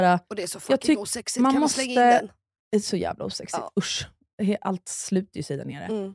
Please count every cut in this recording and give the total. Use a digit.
0